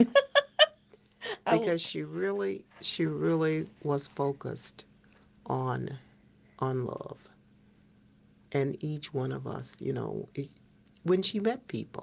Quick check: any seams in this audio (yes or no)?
yes